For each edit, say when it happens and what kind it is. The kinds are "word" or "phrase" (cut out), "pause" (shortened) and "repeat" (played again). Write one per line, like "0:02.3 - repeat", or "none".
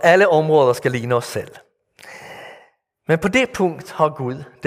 none